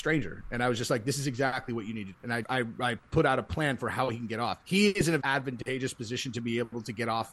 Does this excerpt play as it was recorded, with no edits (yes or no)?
no